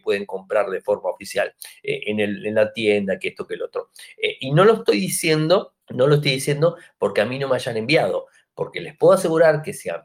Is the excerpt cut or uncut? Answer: cut